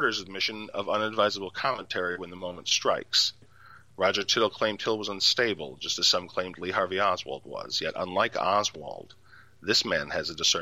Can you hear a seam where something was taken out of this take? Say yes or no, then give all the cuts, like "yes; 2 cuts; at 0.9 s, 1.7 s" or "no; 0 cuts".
no; 0 cuts